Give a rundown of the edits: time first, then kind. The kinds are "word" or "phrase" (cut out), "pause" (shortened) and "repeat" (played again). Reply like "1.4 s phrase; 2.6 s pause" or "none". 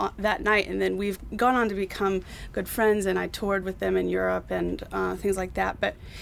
none

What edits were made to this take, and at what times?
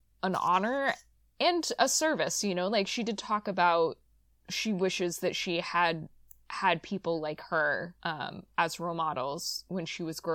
8.0 s pause

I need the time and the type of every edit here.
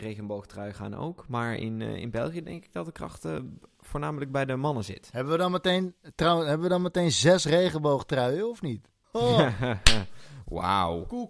9.0 s pause

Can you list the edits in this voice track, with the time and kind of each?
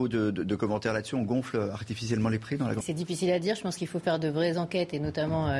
2.8 s word

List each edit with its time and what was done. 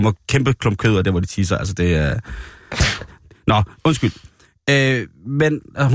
none

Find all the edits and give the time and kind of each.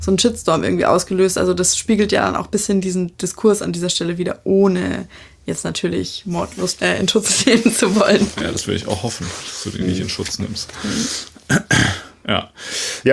6.8 s phrase

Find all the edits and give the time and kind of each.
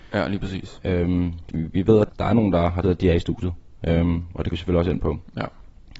1.5 s word; 2.1 s word; 2.8 s word; 4.5 s word

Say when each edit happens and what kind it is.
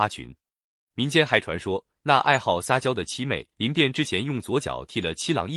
3.5 s pause

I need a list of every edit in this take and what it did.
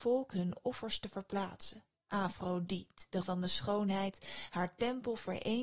2.0 s pause; 3.2 s word

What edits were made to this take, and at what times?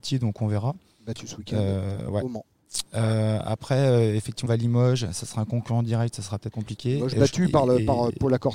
4.5 s phrase; 6.5 s phrase

